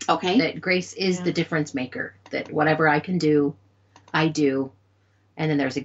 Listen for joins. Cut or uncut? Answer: uncut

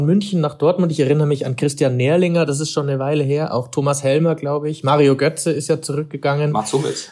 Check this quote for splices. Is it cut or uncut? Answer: uncut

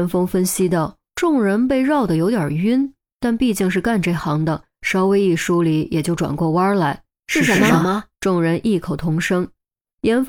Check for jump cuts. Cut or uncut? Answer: cut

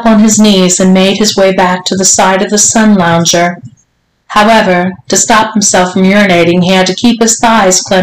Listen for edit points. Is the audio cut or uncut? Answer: uncut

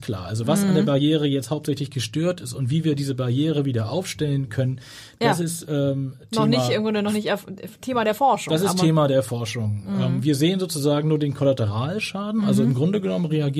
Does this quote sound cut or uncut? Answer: uncut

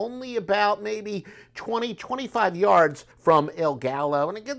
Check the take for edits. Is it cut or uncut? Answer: cut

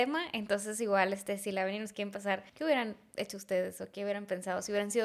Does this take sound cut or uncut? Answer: cut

